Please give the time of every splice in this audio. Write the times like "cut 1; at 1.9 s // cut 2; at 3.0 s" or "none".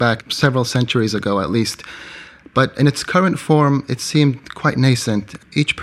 none